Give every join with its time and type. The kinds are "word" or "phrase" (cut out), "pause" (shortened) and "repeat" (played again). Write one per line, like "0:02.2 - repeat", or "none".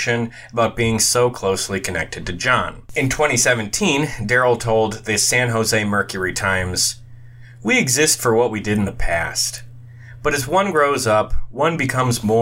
0:02.9 - pause